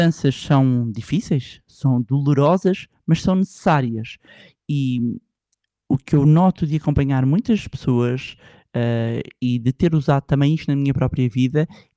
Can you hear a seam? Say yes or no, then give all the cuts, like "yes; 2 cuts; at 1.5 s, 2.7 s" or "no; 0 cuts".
no; 0 cuts